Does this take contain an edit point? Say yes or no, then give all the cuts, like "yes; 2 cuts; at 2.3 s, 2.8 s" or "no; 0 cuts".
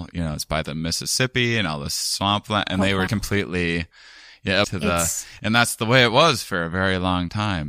yes; 2 cuts; at 3.1 s, 4.6 s